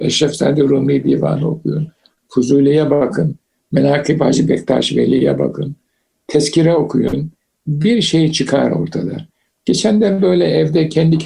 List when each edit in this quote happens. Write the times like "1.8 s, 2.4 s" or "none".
none